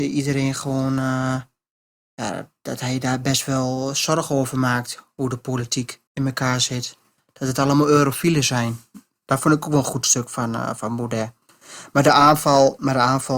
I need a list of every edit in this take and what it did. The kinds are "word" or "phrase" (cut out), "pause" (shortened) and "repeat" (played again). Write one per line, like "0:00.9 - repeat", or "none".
0:06.1 - pause